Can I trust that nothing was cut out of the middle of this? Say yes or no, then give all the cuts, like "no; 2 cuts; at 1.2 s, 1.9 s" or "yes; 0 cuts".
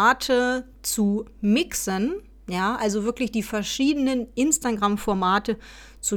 yes; 0 cuts